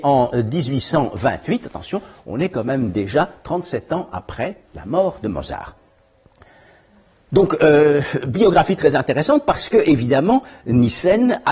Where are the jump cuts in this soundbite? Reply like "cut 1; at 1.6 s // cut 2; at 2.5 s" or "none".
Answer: none